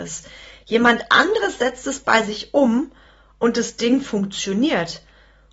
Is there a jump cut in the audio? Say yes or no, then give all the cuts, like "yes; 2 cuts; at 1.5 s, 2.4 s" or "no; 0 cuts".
no; 0 cuts